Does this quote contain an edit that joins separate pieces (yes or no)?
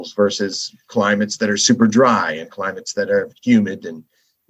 no